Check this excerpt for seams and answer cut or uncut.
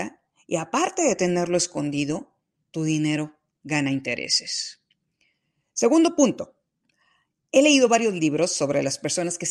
uncut